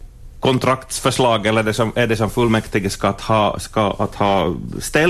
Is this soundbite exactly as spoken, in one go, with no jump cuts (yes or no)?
yes